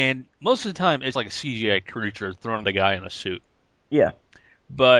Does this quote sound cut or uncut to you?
cut